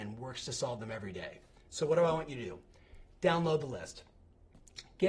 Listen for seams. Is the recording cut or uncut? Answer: uncut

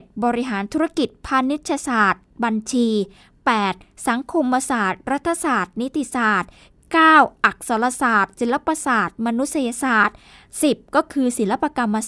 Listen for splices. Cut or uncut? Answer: uncut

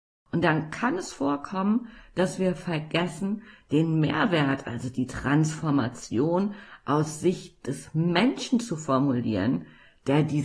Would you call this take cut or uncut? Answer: uncut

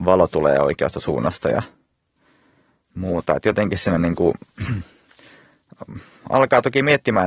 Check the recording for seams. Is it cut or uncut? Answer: uncut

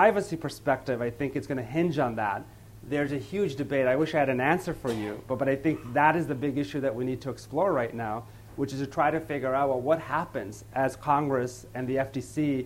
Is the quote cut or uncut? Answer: uncut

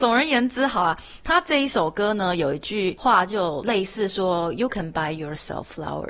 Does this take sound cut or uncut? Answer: uncut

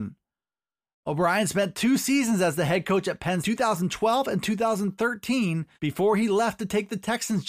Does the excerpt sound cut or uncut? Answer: cut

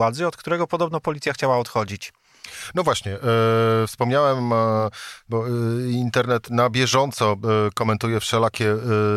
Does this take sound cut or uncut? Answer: uncut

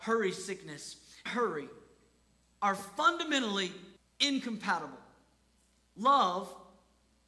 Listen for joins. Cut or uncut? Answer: cut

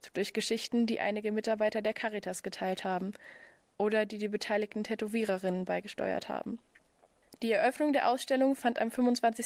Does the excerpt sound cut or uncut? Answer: uncut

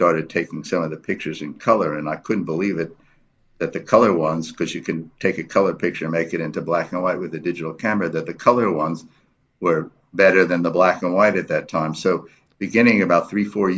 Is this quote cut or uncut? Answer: uncut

